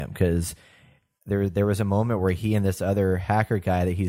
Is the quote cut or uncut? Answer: uncut